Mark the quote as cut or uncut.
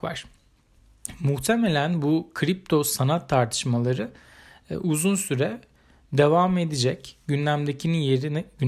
uncut